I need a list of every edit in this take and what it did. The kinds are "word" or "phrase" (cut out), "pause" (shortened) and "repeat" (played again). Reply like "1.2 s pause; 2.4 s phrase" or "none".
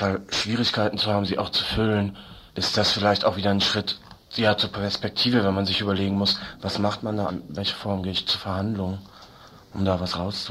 2.5 s pause; 4.2 s pause; 7.3 s word